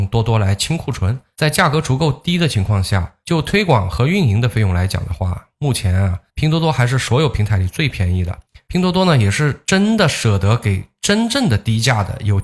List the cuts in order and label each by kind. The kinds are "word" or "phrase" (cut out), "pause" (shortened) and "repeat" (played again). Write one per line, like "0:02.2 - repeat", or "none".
0:06.3 - pause